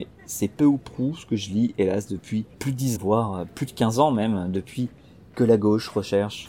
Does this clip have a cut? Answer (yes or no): yes